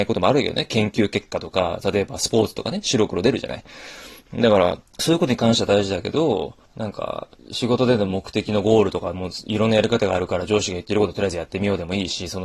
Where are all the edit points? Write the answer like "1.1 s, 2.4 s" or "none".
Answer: 4.9 s, 6.6 s, 7.4 s